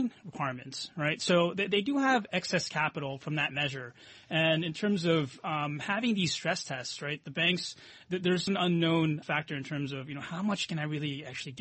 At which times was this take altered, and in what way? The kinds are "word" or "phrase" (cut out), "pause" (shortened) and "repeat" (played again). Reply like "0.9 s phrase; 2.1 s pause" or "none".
8.5 s word; 9.2 s word